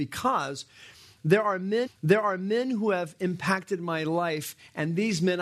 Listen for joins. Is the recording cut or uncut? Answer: cut